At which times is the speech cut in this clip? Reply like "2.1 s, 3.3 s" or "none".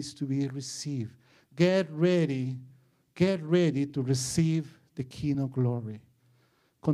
none